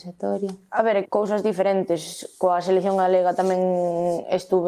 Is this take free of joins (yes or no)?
no